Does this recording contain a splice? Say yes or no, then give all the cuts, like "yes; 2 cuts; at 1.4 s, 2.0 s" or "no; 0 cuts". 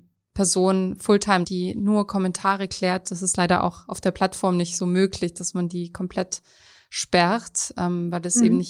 yes; 1 cut; at 1.4 s